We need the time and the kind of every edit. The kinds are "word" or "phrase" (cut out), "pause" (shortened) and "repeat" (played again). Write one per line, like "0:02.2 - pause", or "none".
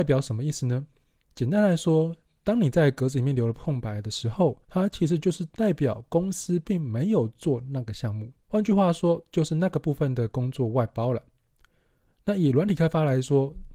0:01.0 - pause
0:04.6 - pause
0:08.4 - pause